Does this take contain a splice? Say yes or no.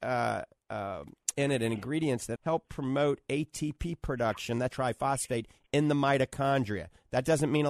yes